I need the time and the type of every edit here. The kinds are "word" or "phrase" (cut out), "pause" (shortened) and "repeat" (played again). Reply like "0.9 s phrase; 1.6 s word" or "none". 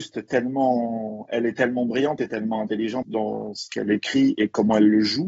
3.0 s word